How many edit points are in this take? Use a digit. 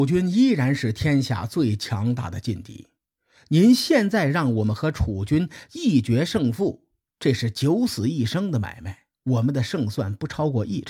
1